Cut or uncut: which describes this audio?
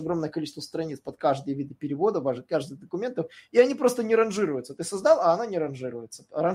uncut